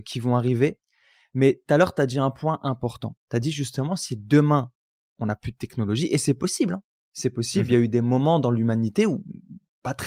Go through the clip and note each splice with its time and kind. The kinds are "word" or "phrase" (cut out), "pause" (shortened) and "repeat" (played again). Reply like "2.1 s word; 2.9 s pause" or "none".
none